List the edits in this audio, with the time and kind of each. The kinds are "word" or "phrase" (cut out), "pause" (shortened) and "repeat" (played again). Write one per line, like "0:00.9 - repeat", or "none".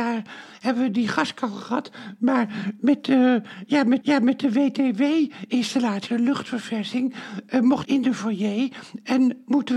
0:04.0 - repeat
0:06.1 - word
0:07.8 - phrase